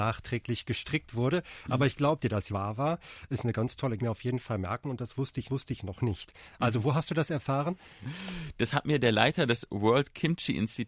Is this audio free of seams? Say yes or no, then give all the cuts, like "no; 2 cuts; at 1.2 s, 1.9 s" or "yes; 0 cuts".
no; 3 cuts; at 2.5 s, 4.0 s, 5.5 s